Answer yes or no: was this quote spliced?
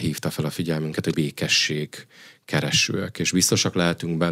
yes